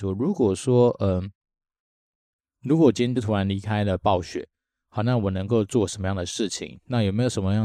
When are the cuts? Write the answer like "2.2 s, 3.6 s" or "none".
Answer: none

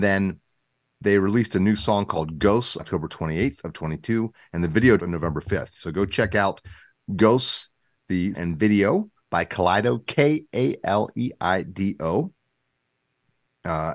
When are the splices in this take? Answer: 2.8 s, 5.0 s, 8.3 s

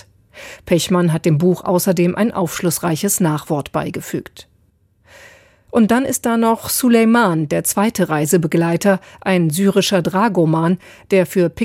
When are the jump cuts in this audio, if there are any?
none

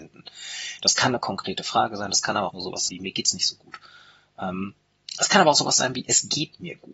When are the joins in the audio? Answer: 2.5 s, 2.9 s

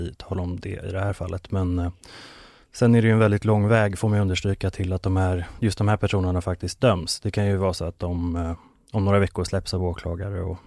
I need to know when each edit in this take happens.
none

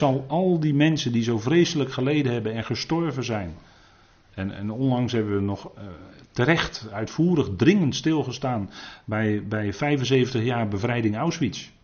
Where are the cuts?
none

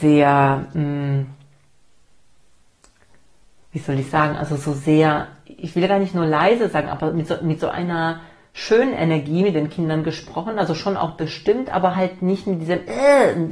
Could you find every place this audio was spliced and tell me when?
none

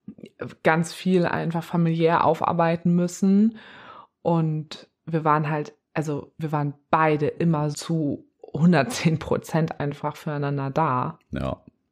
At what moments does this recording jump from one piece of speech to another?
7.7 s

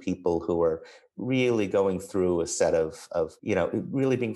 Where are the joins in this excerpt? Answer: 3.4 s

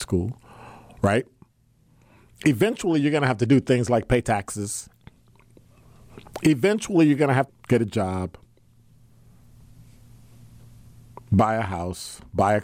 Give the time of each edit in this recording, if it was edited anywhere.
7.5 s

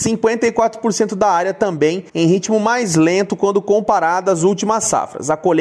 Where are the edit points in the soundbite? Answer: 2.1 s

